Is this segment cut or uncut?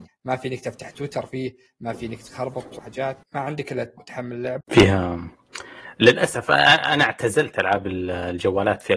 cut